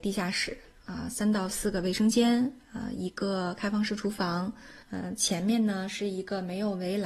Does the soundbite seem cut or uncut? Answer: cut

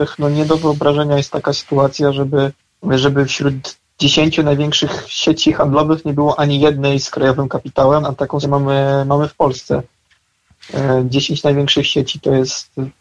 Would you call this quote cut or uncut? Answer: cut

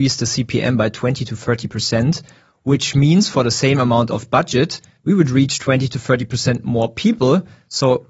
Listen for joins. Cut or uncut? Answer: uncut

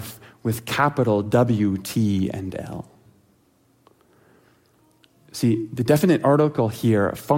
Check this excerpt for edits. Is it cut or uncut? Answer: uncut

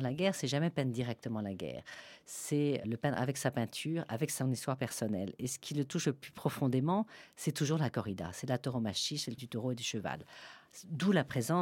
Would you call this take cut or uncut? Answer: cut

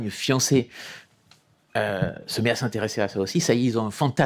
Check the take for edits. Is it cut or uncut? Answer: uncut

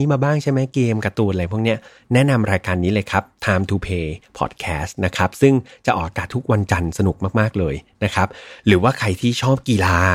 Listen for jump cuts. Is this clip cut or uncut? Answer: uncut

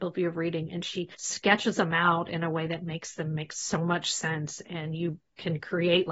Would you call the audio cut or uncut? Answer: cut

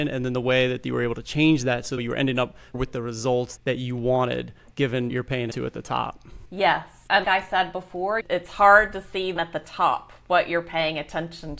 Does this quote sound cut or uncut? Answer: cut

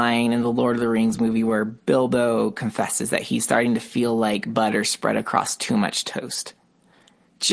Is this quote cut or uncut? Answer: uncut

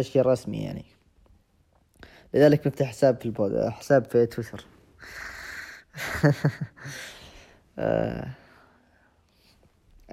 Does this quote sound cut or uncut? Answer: uncut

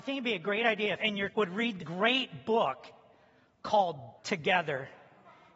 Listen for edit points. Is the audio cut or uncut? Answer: cut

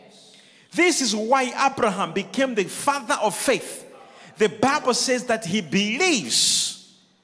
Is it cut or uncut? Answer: uncut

